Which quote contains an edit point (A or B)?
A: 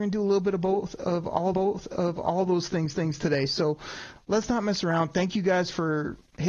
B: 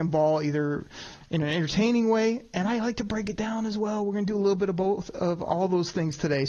A